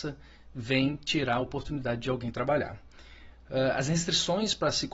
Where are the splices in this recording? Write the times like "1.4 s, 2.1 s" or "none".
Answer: none